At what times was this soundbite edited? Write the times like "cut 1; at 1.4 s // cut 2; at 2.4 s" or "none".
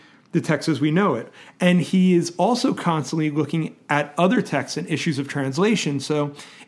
none